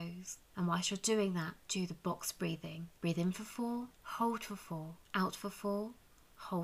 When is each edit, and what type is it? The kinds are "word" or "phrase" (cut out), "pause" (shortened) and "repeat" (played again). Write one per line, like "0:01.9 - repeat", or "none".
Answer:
0:01.6 - pause
0:03.0 - pause
0:03.9 - pause
0:05.0 - pause